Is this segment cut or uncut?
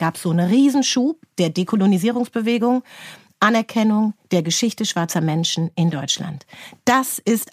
uncut